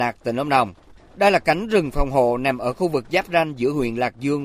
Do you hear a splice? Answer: no; 0 cuts

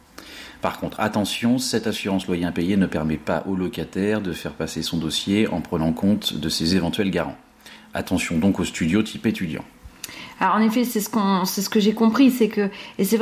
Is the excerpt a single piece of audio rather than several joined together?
yes; 0 cuts

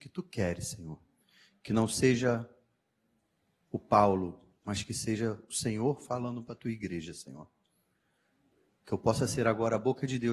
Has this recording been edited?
no; 0 cuts

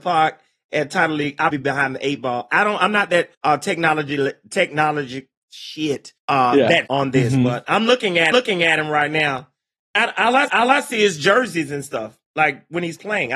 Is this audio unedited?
no; 7 cuts; at 1.5 s, 3.3 s, 5.3 s, 6.2 s, 6.9 s, 8.3 s, 10.5 s

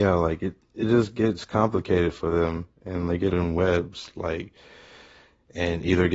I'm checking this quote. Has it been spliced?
yes; 1 cut; at 3.3 s

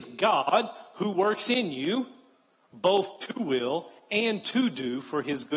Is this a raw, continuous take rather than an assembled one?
yes; 0 cuts

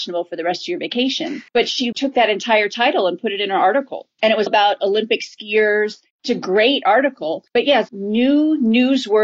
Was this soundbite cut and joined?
yes; 4 cuts; at 1.5 s, 1.9 s, 4.5 s, 7.9 s

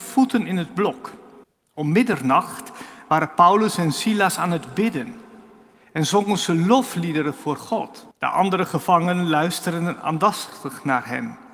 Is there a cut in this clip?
yes; 2 cuts; at 1.4 s, 8.1 s

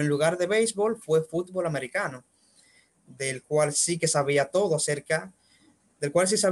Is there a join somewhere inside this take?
no; 0 cuts

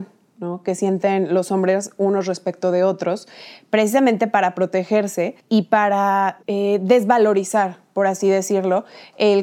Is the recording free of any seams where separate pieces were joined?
no; 2 cuts; at 5.4 s, 6.4 s

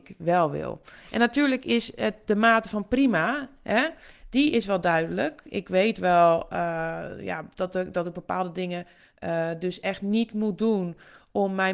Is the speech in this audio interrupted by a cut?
no; 0 cuts

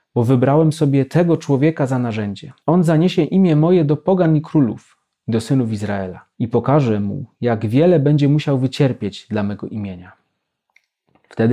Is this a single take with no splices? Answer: no; 2 cuts; at 2.6 s, 6.3 s

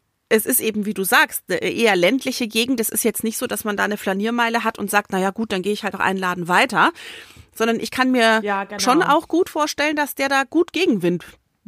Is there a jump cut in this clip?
yes; 1 cut; at 5.9 s

